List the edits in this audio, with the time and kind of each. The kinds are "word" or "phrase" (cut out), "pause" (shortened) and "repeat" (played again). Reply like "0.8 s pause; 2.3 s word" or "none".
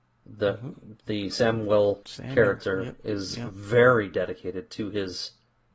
2.0 s phrase